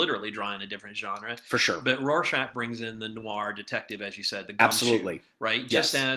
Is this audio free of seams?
yes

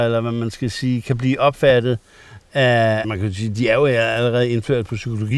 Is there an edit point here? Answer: yes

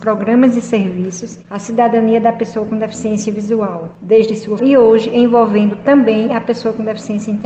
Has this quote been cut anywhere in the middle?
yes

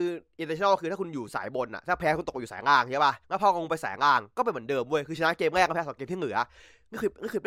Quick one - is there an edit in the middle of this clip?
yes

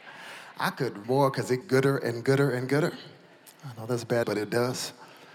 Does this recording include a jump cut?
yes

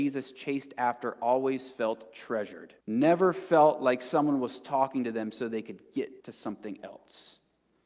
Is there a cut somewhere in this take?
yes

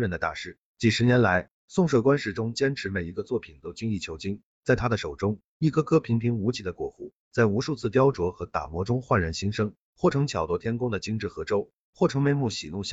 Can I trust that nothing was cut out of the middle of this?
yes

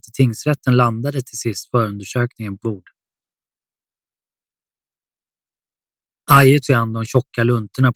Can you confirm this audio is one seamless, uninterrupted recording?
no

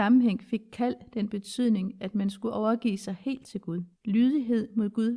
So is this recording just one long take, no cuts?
no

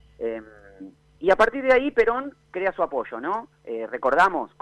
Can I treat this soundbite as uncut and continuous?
yes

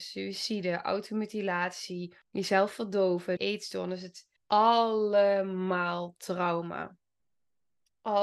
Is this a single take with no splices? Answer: no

